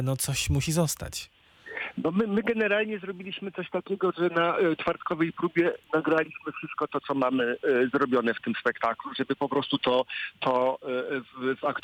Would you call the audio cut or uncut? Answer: uncut